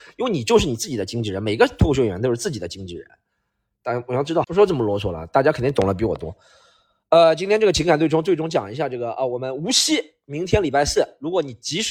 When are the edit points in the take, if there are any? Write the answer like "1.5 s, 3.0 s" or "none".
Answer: 4.4 s